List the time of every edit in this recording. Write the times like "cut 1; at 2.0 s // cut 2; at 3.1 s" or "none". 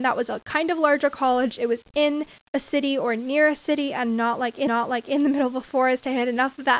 cut 1; at 4.7 s